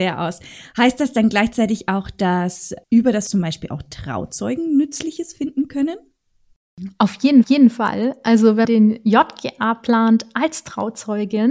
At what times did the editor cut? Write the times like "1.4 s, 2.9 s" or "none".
2.8 s, 3.3 s, 7.4 s, 8.6 s